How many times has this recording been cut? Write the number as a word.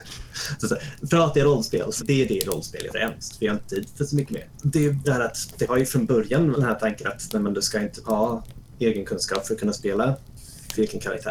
five